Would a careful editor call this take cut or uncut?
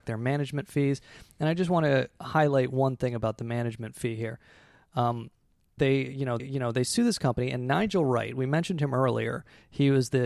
cut